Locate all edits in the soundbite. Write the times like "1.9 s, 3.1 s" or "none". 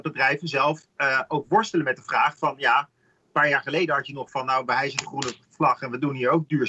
none